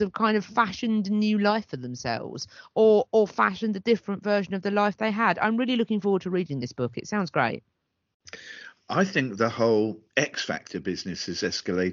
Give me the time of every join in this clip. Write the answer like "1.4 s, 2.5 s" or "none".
10.1 s